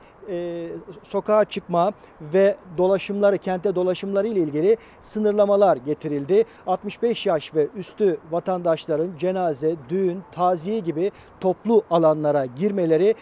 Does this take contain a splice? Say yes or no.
no